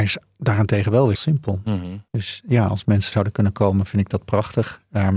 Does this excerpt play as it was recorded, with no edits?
no; 3 cuts; at 1.1 s, 2.1 s, 3.1 s

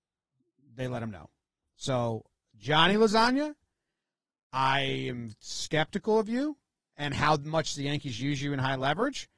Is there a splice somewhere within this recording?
no; 0 cuts

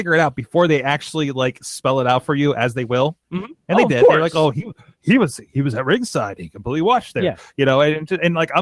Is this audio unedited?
yes; 0 cuts

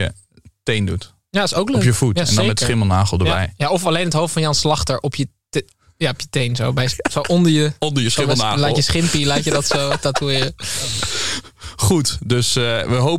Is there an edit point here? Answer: no; 0 cuts

